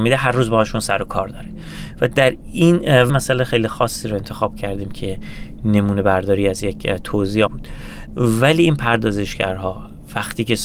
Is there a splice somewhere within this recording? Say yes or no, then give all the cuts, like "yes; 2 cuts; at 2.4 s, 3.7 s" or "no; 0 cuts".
yes; 2 cuts; at 3.1 s, 7.5 s